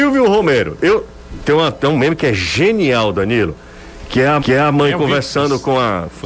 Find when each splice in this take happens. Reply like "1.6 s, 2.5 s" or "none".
4.4 s